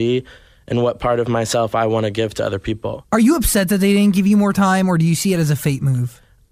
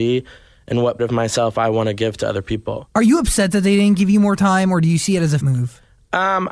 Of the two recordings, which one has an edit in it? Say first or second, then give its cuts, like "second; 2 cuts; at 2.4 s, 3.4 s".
second; 2 cuts; at 1.0 s, 5.4 s